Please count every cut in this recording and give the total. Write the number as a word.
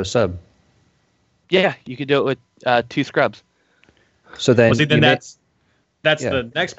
zero